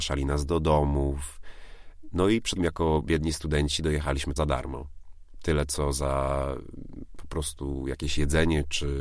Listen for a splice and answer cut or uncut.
cut